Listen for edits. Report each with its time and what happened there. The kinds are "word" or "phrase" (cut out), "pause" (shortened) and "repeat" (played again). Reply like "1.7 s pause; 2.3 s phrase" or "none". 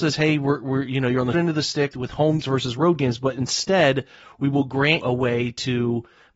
1.3 s word; 1.9 s word; 2.4 s word; 5.0 s word